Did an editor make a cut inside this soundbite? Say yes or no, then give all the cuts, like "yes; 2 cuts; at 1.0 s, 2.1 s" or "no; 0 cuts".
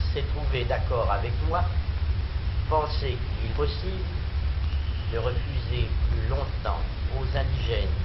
yes; 2 cuts; at 2.7 s, 3.5 s